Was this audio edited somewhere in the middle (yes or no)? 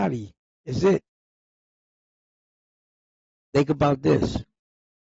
no